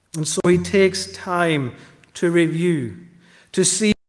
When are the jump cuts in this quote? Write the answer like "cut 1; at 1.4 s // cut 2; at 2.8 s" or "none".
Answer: none